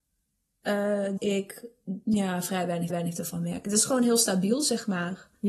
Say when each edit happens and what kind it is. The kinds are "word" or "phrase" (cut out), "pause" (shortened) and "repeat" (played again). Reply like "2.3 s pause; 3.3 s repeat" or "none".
1.2 s word; 2.0 s pause; 2.9 s repeat